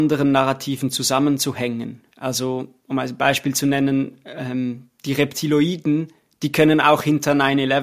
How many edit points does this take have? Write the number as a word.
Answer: one